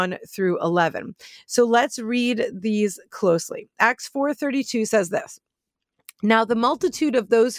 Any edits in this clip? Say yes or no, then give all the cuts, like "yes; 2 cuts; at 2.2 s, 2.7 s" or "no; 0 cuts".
no; 0 cuts